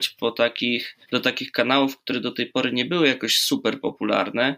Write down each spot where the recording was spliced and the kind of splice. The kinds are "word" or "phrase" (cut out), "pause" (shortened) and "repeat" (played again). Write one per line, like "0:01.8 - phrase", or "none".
0:01.0 - pause